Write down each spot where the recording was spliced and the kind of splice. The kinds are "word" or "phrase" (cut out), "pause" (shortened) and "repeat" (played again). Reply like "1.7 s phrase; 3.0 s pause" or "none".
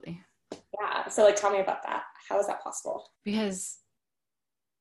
3.2 s pause